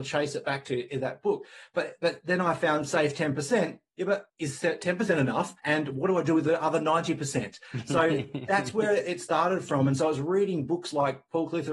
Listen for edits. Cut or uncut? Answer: cut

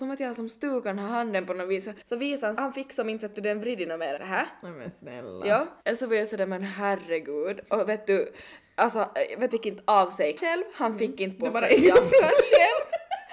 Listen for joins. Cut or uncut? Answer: cut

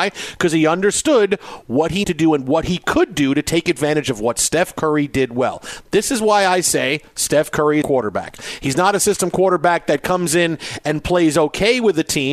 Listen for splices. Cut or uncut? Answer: cut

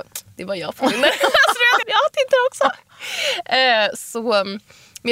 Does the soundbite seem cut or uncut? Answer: cut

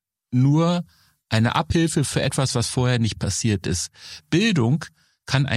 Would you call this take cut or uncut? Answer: uncut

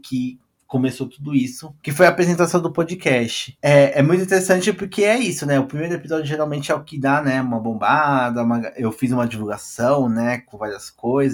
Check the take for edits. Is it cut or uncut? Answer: uncut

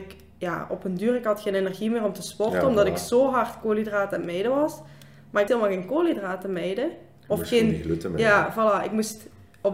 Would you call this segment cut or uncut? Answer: cut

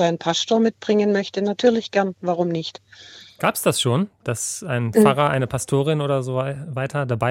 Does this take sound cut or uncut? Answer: uncut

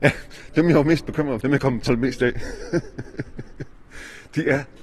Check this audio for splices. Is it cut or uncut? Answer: cut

